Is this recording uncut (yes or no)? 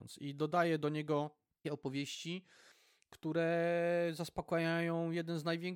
no